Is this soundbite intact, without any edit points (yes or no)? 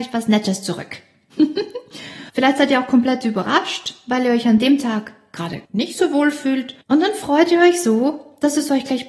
no